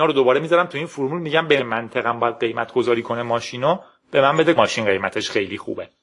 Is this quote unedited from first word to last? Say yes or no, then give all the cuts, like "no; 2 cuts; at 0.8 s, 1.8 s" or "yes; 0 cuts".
no; 2 cuts; at 1.6 s, 4.6 s